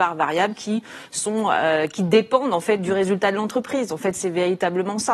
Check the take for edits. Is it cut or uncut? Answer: uncut